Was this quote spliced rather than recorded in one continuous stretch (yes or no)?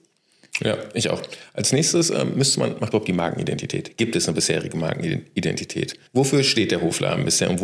yes